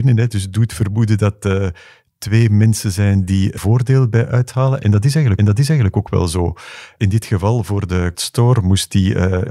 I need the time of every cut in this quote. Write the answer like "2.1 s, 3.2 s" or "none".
3.6 s, 5.4 s, 8.1 s